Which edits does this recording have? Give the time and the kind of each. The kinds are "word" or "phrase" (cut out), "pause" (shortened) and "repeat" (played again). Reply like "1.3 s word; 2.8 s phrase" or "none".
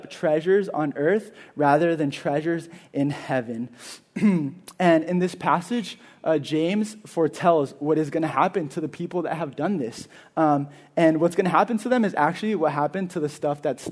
none